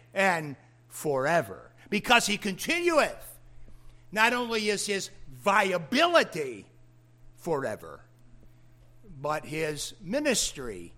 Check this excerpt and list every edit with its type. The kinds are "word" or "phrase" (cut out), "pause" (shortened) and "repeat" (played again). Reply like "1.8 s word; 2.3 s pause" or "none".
none